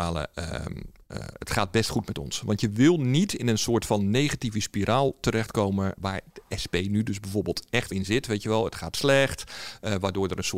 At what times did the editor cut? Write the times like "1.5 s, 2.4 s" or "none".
6.0 s, 7.9 s